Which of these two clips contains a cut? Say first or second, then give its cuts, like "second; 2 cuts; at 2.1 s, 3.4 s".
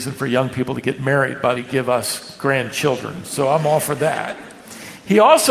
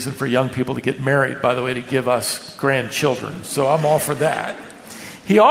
first; 1 cut; at 1.6 s